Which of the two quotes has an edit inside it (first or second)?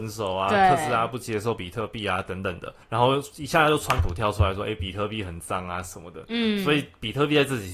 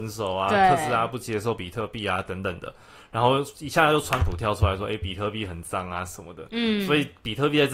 first